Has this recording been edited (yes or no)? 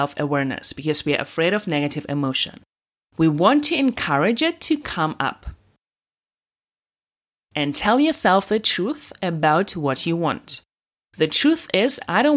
no